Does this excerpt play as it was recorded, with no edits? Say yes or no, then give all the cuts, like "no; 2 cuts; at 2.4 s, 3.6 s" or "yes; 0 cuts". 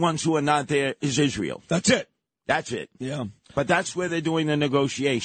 yes; 0 cuts